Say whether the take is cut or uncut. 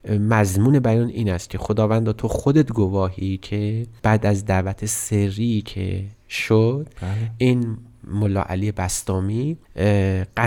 uncut